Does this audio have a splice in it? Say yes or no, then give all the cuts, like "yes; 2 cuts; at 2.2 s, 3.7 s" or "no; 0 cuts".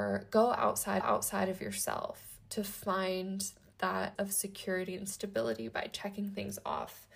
yes; 2 cuts; at 1.0 s, 4.2 s